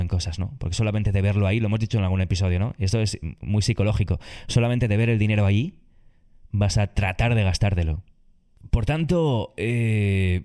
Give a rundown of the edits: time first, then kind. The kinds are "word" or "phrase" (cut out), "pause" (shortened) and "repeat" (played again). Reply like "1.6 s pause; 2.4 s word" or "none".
none